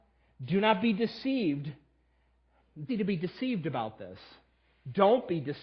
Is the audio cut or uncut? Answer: cut